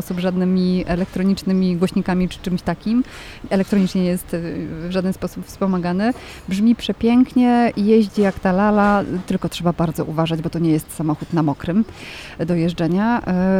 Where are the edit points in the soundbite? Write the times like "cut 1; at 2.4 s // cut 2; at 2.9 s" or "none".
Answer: none